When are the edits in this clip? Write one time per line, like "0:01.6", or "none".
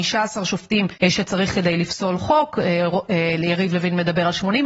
0:01.0